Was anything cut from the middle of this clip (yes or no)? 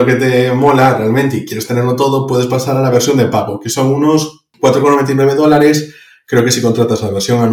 no